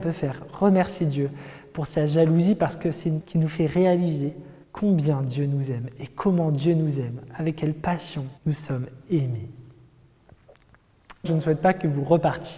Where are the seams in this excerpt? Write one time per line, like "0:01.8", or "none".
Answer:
0:03.2
0:04.6
0:08.4
0:11.3